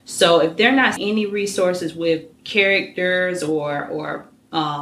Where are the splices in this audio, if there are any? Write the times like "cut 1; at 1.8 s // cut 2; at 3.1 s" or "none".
cut 1; at 1.0 s // cut 2; at 2.3 s